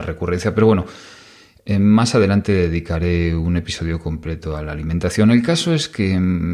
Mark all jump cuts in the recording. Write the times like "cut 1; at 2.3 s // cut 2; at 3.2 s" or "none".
none